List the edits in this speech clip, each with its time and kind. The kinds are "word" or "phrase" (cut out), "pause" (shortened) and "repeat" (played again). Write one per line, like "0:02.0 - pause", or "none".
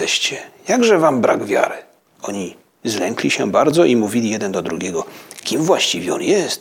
0:02.0 - pause

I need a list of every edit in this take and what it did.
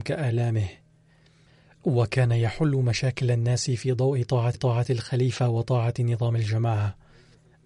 0:04.5 - repeat

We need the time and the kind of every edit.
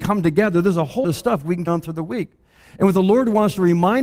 0:01.0 - word
0:01.7 - word

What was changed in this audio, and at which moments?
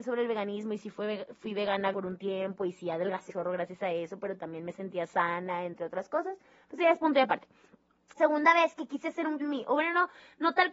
0:01.9 - word
0:03.3 - word
0:08.2 - word
0:09.4 - word

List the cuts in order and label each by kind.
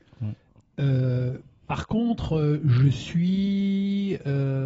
none

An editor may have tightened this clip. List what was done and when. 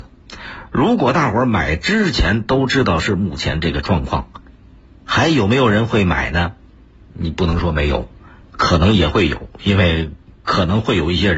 none

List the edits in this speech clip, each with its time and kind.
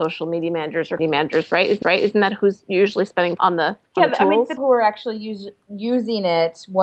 0:01.0 - word
0:01.8 - repeat
0:03.4 - word
0:03.8 - pause
0:04.6 - word

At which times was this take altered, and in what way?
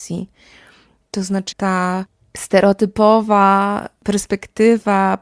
0:01.5 - word

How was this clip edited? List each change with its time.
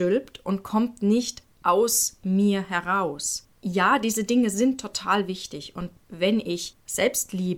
0:03.5 - pause

